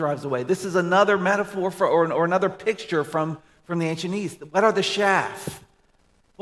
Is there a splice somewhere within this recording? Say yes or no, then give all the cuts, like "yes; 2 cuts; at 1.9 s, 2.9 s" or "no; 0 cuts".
no; 0 cuts